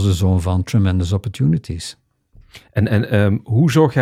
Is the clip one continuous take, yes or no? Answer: yes